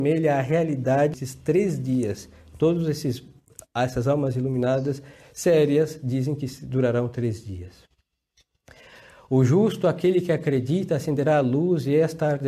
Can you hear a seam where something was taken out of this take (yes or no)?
no